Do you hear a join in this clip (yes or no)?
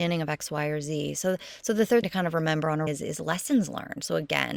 yes